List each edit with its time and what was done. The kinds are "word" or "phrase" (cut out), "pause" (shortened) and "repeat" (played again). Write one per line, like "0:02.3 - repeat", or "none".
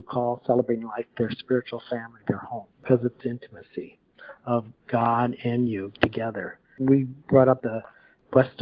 0:02.7 - pause
0:03.2 - phrase
0:07.6 - word